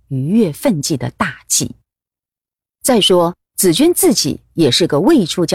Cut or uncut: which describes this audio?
cut